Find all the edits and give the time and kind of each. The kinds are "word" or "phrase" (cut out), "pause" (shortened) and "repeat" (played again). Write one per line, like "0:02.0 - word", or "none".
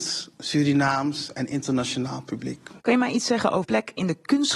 0:02.8 - pause
0:03.6 - word